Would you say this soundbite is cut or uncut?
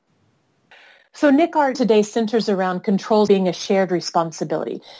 cut